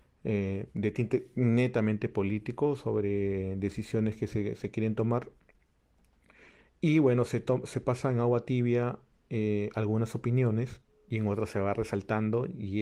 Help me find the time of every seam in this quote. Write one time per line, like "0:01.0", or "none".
none